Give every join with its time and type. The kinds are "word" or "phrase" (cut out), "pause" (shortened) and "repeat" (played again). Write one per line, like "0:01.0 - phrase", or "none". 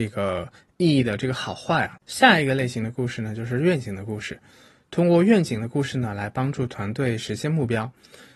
0:02.0 - pause